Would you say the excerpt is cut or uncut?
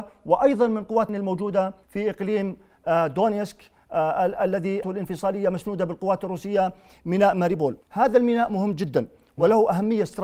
cut